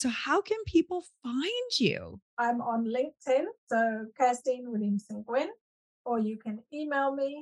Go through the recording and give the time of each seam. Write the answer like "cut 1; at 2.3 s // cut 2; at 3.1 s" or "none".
cut 1; at 2.3 s // cut 2; at 3.6 s